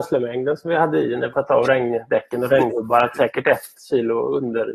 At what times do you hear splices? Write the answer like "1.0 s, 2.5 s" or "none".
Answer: 1.3 s, 3.1 s